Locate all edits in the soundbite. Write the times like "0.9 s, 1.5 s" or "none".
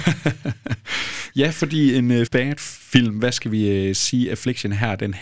2.3 s